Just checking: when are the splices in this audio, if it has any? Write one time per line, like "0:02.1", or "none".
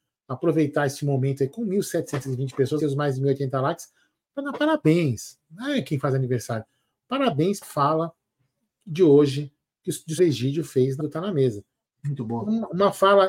0:02.8
0:07.6
0:10.2
0:11.0